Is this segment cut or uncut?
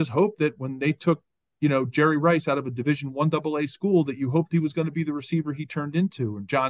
uncut